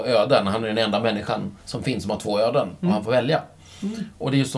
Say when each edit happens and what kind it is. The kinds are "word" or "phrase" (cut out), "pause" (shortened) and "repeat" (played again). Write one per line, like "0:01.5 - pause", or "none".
0:01.6 - pause